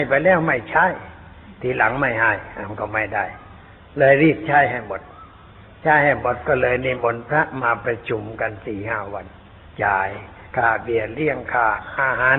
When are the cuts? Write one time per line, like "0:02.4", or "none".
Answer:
none